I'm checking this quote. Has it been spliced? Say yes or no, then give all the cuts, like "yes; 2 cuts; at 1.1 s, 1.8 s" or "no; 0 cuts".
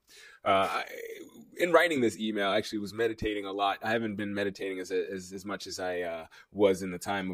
no; 0 cuts